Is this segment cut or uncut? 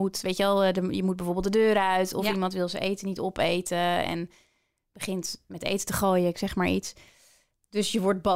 uncut